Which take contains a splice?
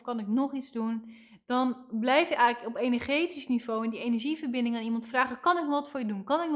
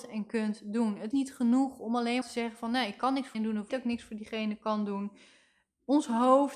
second; 4 cuts; at 1.1 s, 2.2 s, 3.3 s, 3.7 s

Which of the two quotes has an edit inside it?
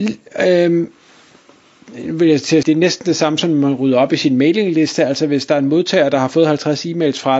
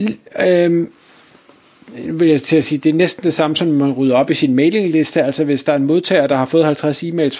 first; 1 cut; at 2.6 s

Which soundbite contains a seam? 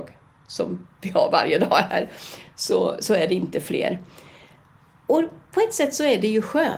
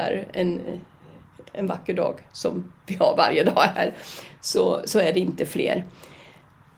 second; 1 cut; at 2.3 s

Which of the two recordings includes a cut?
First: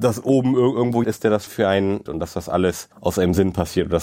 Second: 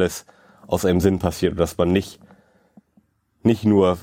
first; 4 cuts; at 1.0 s, 1.5 s, 2.1 s, 2.9 s

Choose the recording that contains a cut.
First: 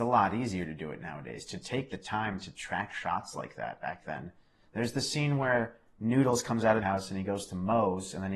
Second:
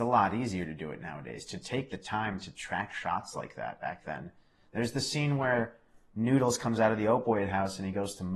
first; 2 cuts; at 5.9 s, 6.8 s

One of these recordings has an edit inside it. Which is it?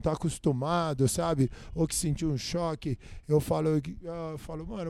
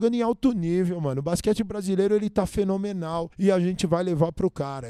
second; 1 cut; at 3.3 s

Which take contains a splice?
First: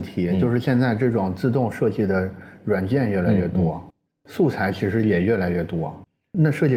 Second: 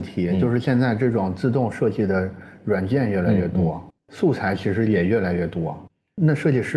second; 1 cut; at 4.0 s

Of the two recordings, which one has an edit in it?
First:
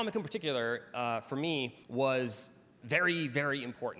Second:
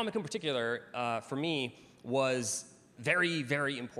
first; 1 cut; at 1.8 s

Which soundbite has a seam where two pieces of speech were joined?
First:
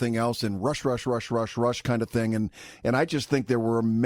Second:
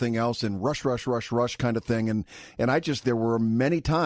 second; 2 cuts; at 1.3 s, 3.0 s

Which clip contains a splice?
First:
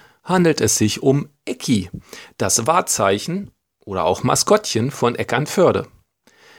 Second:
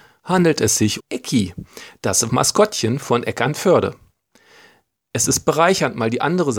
second; 2 cuts; at 1.0 s, 2.3 s

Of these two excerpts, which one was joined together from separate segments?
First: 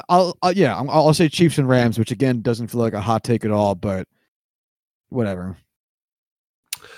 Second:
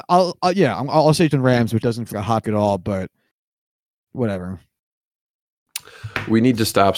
second; 4 cuts; at 1.3 s, 1.8 s, 2.1 s, 2.4 s

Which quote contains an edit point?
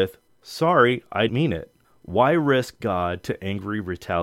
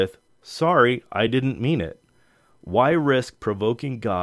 first; 3 cuts; at 1.3 s, 1.8 s, 2.8 s

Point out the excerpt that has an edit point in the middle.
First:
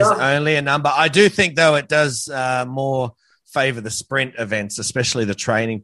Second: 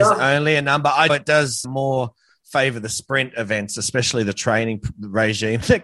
second; 2 cuts; at 1.1 s, 1.6 s

